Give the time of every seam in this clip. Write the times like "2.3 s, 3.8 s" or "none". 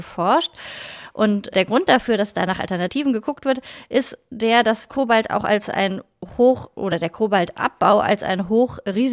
1.5 s